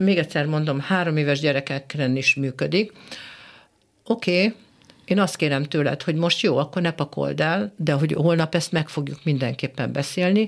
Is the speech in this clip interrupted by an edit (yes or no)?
no